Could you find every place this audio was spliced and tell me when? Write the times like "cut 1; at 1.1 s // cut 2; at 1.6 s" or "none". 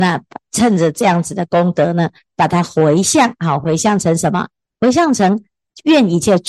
none